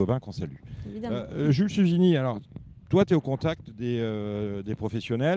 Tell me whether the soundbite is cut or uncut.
uncut